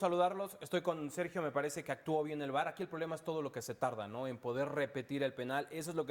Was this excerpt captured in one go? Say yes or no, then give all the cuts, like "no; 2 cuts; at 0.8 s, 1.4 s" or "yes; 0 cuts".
yes; 0 cuts